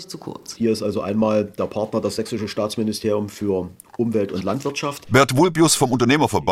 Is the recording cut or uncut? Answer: uncut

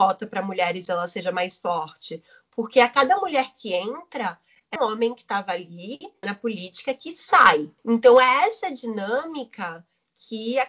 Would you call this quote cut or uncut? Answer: cut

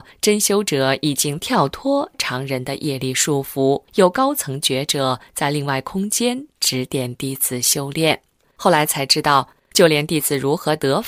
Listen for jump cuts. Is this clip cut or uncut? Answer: cut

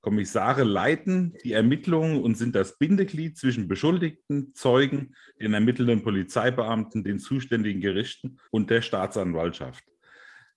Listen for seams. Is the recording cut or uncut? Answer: cut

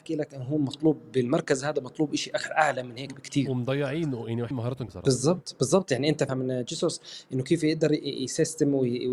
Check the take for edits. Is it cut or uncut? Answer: cut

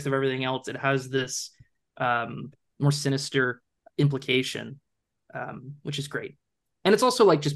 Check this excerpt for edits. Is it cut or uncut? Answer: uncut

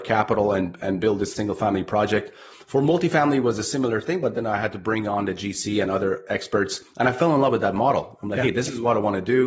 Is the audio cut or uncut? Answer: uncut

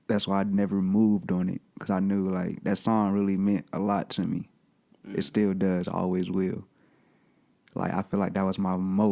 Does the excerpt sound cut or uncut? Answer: uncut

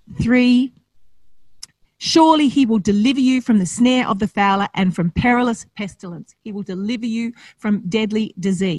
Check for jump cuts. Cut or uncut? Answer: uncut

